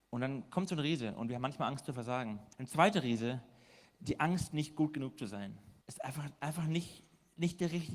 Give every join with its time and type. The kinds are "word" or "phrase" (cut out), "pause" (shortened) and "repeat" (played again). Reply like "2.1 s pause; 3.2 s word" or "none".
2.5 s pause; 5.8 s pause